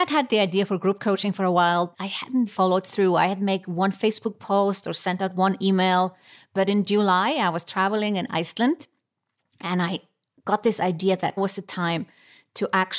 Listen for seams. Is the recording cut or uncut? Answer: cut